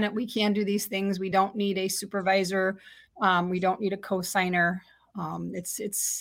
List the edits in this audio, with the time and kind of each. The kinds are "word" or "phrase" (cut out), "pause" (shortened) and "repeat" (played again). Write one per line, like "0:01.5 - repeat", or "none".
none